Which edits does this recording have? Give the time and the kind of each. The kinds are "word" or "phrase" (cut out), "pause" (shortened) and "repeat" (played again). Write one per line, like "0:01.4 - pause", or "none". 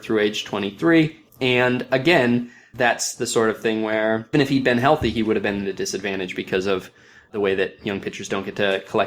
0:04.3 - word